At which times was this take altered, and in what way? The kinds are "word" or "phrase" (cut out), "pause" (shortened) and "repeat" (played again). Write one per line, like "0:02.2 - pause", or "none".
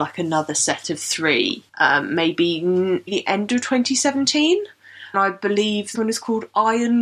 0:01.7 - pause
0:03.1 - word
0:05.1 - word
0:06.0 - word